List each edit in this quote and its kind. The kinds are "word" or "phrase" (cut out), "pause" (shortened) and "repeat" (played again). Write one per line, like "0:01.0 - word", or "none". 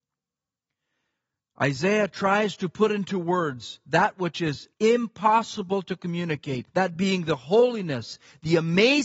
0:04.7 - pause
0:06.7 - pause